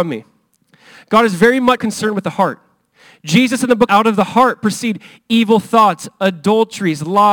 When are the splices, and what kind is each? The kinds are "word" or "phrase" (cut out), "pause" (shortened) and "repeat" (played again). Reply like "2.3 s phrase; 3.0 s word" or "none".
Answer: 1.8 s word; 3.9 s phrase